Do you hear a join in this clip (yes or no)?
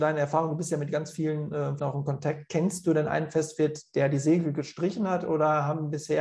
yes